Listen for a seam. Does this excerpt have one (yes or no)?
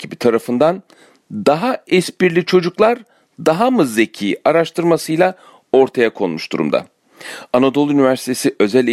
no